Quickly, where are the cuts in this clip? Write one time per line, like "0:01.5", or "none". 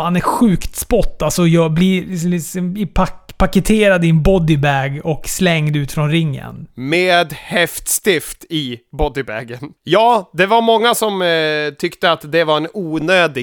0:09.8